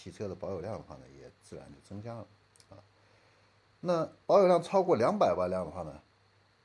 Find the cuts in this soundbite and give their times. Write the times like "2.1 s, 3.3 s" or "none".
4.2 s